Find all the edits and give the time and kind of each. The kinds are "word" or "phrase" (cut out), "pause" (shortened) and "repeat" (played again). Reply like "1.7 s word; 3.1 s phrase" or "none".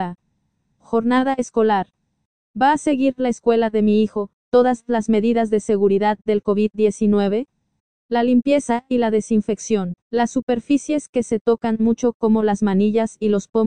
10.0 s pause